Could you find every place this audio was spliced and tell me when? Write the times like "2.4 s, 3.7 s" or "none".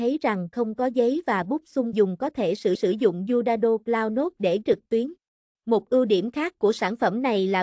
1.9 s, 2.7 s, 4.6 s, 5.4 s